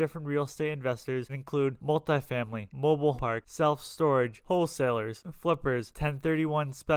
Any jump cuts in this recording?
yes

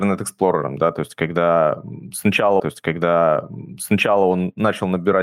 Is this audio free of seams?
no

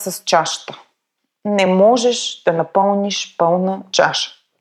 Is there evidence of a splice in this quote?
no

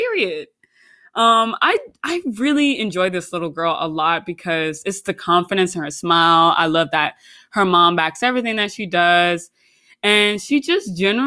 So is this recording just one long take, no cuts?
yes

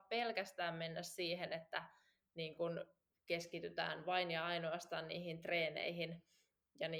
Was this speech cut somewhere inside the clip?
no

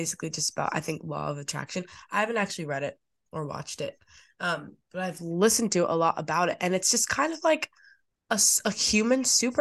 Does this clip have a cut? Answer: no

